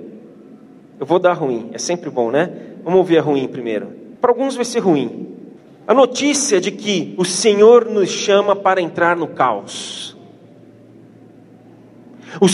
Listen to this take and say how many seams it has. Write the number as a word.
two